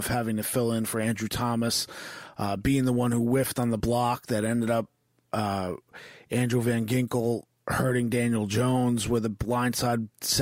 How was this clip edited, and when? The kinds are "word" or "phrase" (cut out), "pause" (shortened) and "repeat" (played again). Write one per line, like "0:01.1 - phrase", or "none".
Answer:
none